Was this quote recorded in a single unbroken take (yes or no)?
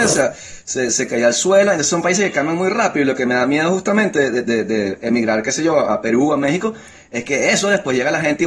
yes